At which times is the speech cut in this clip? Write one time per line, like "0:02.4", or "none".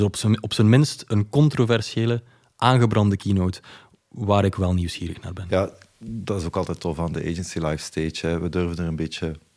none